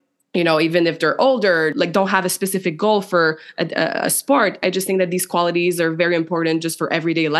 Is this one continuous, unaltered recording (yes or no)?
yes